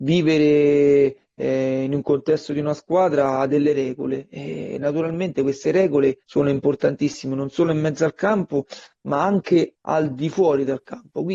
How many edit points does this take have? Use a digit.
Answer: 1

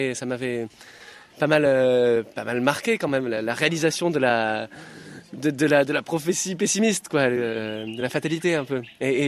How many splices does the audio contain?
0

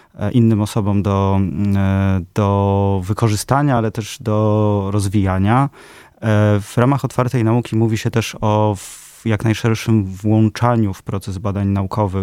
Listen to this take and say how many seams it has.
0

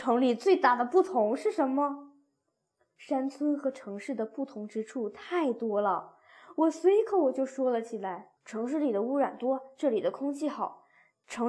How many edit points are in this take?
1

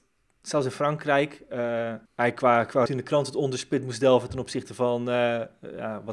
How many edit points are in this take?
2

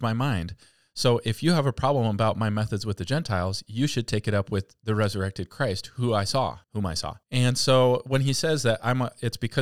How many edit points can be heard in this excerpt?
2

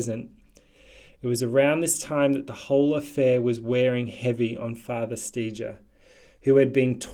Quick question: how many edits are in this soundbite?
0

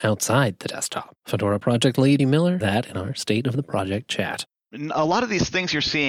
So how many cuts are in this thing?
3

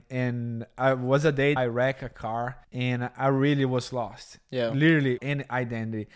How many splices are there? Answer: 3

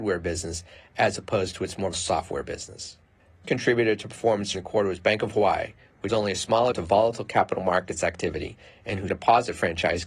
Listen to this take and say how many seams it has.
6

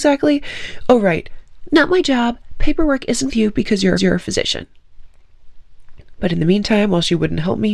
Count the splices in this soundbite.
2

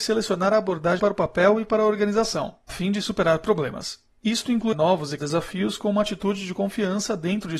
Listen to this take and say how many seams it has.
4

